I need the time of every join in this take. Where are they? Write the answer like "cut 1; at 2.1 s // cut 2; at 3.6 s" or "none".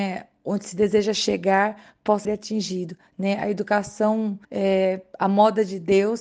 cut 1; at 2.2 s // cut 2; at 4.4 s